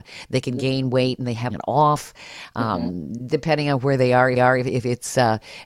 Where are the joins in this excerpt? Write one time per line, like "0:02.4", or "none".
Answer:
0:01.5
0:04.4